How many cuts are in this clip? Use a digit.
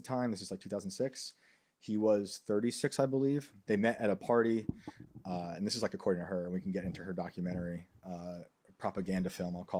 0